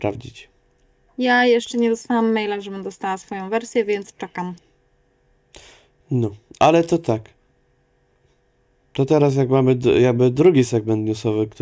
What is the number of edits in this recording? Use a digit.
0